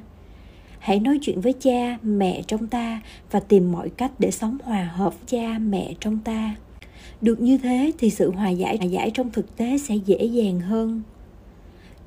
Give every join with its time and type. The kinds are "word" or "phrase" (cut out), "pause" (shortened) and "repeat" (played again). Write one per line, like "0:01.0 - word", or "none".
0:05.2 - word
0:08.8 - repeat